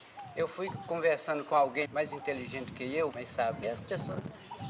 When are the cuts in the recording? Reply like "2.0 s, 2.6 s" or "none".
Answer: 1.9 s, 3.1 s, 3.6 s